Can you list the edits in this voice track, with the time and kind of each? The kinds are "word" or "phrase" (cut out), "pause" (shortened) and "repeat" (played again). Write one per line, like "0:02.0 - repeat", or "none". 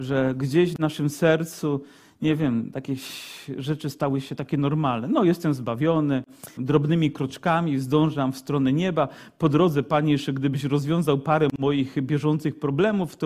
0:06.6 - word